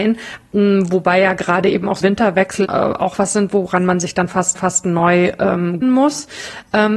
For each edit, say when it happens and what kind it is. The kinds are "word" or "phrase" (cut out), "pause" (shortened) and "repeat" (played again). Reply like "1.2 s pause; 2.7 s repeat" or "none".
2.0 s word; 2.7 s word; 4.5 s repeat; 5.8 s word

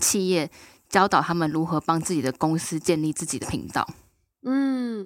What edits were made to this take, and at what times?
3.4 s word

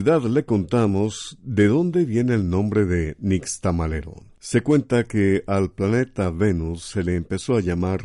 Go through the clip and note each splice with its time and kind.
none

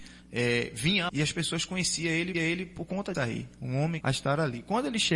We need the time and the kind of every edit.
1.1 s word; 2.3 s repeat; 3.1 s word; 4.0 s phrase

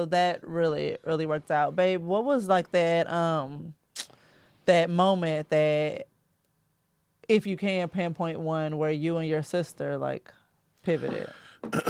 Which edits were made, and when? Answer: none

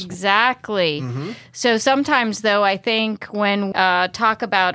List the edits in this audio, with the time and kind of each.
3.7 s word

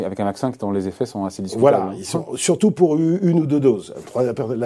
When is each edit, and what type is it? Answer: none

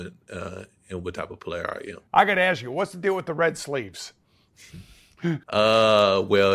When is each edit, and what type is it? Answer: 2.1 s pause; 5.4 s pause

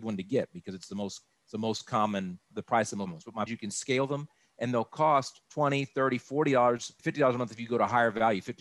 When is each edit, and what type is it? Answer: 2.5 s word; 3.0 s phrase; 3.5 s word; 5.4 s pause; 7.0 s word

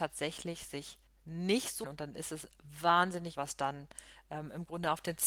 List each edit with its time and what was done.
1.1 s pause; 1.8 s phrase; 3.3 s word

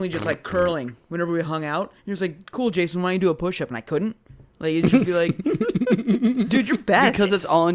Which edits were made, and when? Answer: 2.0 s pause

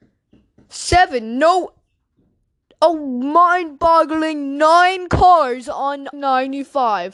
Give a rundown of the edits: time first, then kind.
6.1 s word

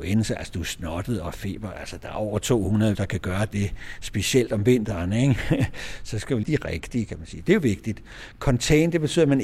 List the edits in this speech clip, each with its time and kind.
2.9 s word; 6.4 s phrase

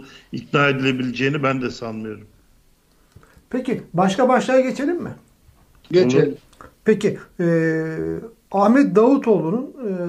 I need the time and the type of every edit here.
none

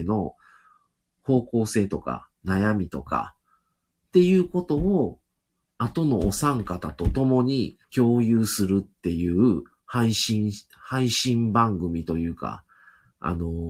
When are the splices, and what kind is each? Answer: 7.8 s pause

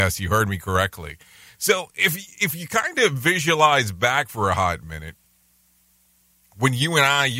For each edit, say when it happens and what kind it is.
none

